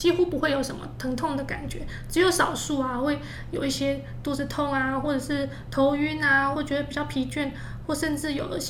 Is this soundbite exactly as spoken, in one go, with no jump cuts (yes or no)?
no